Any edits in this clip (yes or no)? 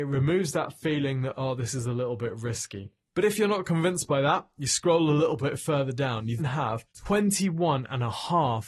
yes